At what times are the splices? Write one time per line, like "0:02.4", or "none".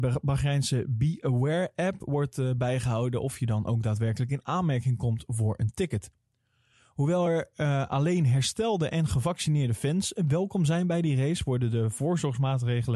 none